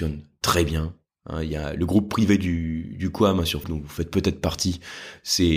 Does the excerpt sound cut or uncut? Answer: cut